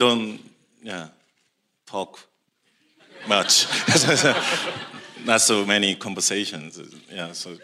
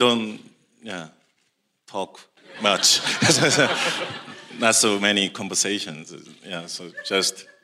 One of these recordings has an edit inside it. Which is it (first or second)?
second